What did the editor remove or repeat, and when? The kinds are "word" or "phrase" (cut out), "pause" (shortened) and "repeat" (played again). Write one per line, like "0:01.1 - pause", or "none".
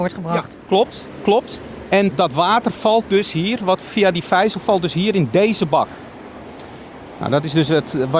0:02.1 - word